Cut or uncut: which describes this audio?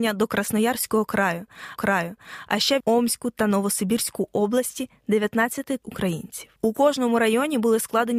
cut